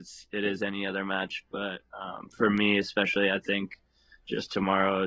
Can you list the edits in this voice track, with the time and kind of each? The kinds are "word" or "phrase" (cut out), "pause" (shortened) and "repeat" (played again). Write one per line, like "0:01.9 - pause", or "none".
none